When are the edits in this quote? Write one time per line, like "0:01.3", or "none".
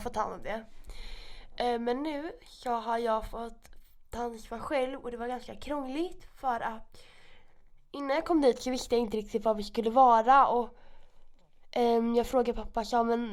none